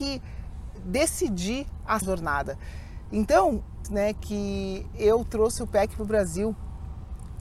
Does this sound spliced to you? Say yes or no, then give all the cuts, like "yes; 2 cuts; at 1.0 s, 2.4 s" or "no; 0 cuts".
yes; 2 cuts; at 2.0 s, 3.8 s